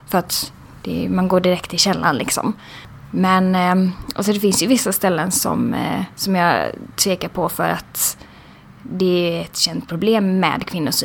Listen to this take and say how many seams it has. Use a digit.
1